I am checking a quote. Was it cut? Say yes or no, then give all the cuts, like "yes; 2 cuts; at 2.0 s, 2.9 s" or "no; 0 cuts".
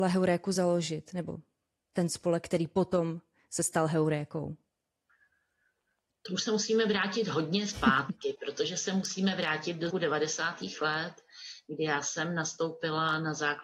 yes; 1 cut; at 9.9 s